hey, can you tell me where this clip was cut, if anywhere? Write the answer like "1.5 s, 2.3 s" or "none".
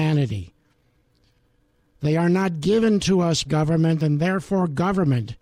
3.5 s